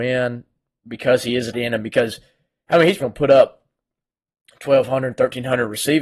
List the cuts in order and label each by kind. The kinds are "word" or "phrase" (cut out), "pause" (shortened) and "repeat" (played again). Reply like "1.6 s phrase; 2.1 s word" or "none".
1.5 s word; 3.0 s word